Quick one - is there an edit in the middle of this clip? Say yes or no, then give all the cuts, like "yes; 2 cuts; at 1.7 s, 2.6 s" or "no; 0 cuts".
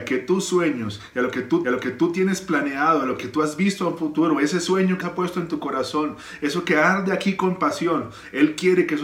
yes; 2 cuts; at 1.6 s, 5.0 s